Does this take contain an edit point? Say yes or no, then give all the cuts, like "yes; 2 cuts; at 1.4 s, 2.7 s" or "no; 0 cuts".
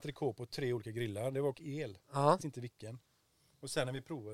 yes; 2 cuts; at 1.5 s, 2.4 s